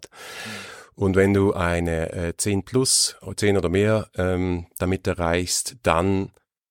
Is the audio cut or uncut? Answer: uncut